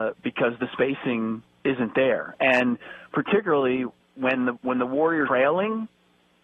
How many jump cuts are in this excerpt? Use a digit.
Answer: 2